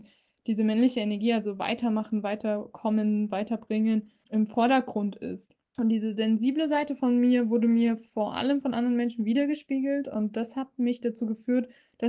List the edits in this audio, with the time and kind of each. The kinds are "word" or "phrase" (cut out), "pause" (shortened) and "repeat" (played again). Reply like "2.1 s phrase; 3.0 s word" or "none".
none

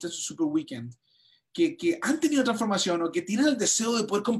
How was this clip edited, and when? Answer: none

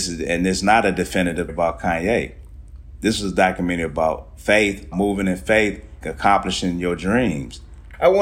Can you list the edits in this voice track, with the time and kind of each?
1.5 s word; 4.9 s word; 6.0 s word

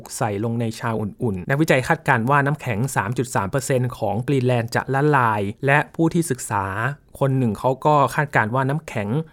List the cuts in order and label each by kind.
1.4 s word; 5.6 s pause

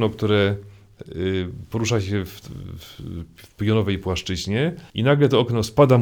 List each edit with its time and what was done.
4.9 s pause

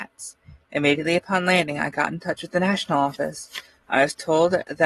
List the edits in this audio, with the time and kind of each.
none

